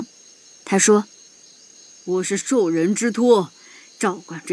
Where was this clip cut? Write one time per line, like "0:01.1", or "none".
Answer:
0:01.1